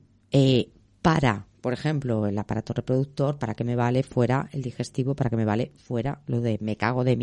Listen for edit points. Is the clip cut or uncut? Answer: uncut